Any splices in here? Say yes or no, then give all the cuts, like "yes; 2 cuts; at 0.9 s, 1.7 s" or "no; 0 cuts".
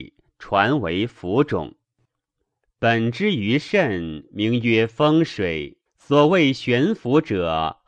yes; 1 cut; at 5.9 s